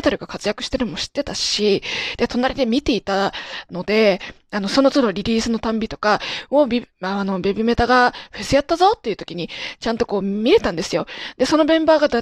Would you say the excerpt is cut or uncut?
uncut